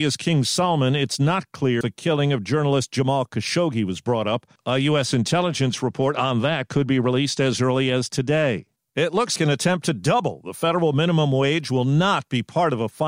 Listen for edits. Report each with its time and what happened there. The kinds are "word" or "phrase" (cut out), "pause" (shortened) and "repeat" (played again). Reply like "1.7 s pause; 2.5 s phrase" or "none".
1.8 s word; 9.4 s word